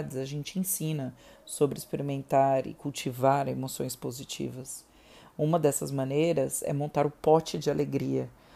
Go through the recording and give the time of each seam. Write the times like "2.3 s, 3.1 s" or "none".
none